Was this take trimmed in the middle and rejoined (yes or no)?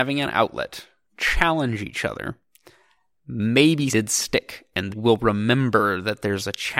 yes